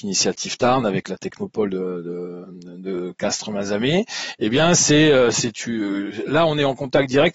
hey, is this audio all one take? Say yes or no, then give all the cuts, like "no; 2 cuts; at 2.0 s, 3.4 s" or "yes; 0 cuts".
yes; 0 cuts